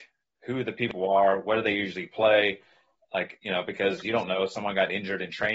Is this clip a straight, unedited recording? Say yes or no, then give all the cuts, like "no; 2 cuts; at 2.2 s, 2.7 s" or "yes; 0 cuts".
yes; 0 cuts